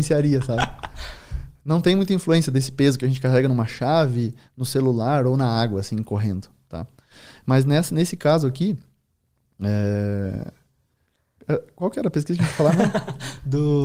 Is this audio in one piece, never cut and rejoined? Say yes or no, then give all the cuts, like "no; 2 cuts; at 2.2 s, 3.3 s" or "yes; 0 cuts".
yes; 0 cuts